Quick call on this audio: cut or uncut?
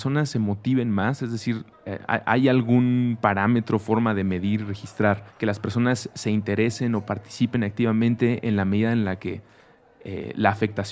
cut